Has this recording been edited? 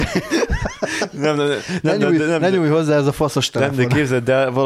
no; 0 cuts

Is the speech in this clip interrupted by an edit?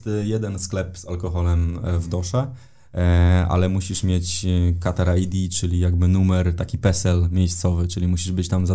no; 0 cuts

